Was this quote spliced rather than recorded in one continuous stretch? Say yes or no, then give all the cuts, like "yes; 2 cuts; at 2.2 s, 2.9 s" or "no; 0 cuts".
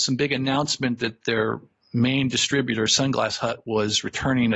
no; 0 cuts